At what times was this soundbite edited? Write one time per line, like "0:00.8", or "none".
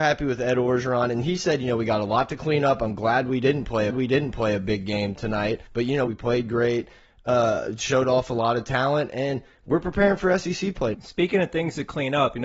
0:03.9
0:05.7
0:06.1
0:10.9